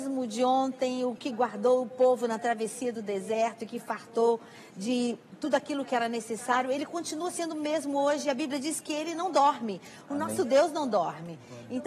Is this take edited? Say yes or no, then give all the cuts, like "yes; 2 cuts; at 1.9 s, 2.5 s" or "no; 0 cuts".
no; 0 cuts